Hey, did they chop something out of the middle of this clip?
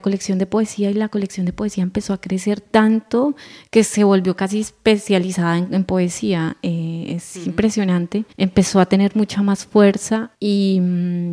yes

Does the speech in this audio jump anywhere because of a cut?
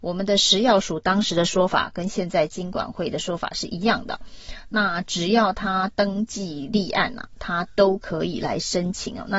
no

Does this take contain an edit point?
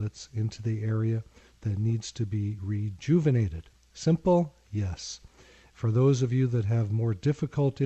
no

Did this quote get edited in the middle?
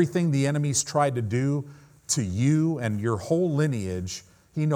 no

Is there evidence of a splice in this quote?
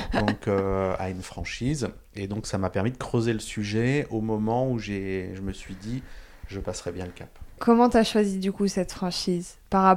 no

